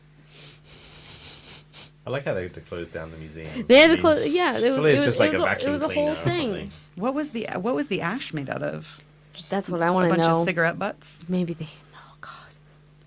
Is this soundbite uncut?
yes; 0 cuts

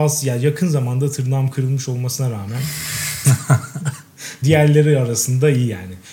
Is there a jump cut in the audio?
yes; 1 cut; at 4.4 s

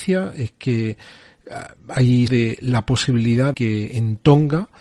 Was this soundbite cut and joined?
yes; 2 cuts; at 2.3 s, 3.5 s

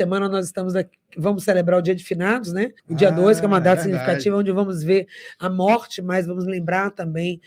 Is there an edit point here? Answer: yes; 1 cut; at 2.8 s

